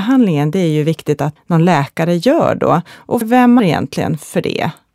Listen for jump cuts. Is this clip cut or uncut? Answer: cut